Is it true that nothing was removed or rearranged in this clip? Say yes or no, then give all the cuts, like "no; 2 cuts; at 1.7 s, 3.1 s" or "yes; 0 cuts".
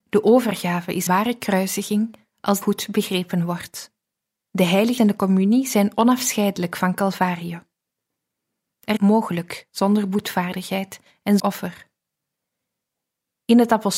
no; 6 cuts; at 1.1 s, 2.6 s, 4.0 s, 5.0 s, 9.0 s, 11.4 s